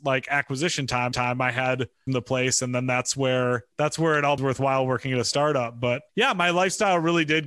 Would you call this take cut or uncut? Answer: cut